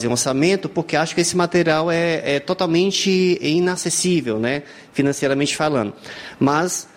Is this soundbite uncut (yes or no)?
yes